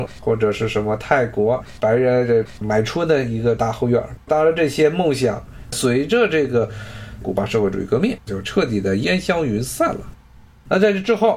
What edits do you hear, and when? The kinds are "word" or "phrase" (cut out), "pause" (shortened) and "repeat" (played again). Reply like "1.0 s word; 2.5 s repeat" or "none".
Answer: 4.2 s pause; 8.2 s pause